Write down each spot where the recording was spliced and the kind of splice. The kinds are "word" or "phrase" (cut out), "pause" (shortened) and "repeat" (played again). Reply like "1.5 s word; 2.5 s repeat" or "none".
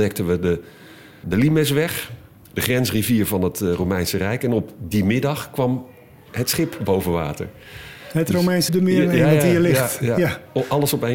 1.2 s word; 8.7 s word